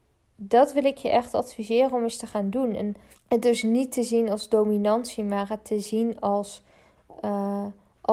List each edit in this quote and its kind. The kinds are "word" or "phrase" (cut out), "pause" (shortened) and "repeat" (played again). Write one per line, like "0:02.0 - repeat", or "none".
0:03.1 - pause